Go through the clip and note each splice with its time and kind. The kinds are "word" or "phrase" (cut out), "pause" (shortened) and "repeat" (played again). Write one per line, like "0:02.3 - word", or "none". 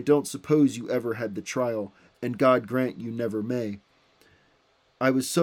none